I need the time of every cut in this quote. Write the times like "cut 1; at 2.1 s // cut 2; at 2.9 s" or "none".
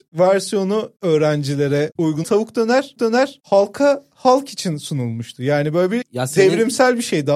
cut 1; at 2.2 s // cut 2; at 3.0 s // cut 3; at 6.0 s